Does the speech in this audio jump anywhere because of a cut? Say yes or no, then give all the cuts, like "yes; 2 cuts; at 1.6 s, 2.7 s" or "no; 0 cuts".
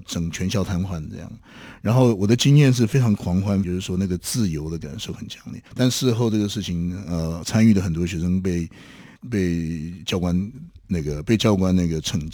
yes; 4 cuts; at 3.6 s, 5.7 s, 9.2 s, 10.8 s